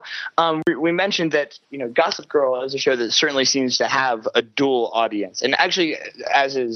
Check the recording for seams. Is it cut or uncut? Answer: cut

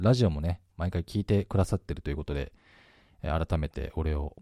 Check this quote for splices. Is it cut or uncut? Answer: uncut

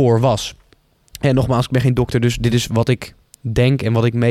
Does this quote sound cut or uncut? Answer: uncut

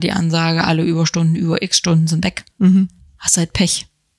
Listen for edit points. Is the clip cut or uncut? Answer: cut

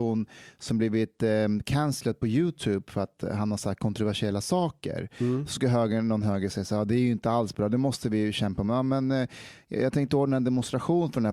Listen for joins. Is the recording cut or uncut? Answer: uncut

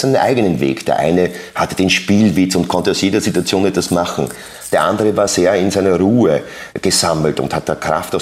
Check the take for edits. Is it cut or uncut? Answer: uncut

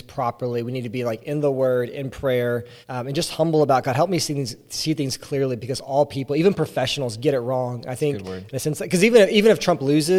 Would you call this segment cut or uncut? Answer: cut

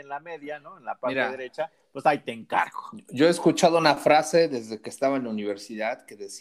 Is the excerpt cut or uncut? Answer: uncut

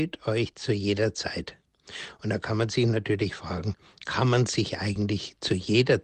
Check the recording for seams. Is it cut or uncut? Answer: uncut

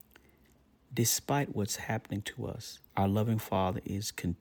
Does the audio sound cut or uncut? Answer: cut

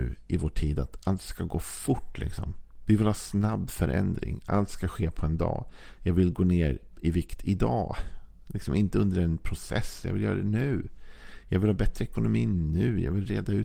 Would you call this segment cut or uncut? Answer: uncut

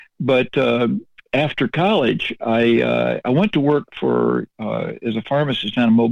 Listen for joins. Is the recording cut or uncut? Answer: uncut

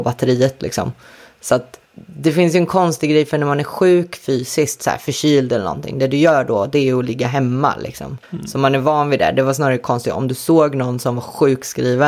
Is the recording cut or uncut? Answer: cut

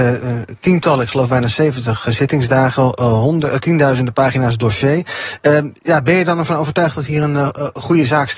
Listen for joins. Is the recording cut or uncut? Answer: uncut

